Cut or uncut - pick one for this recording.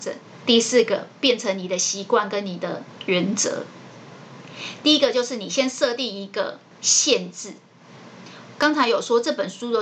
cut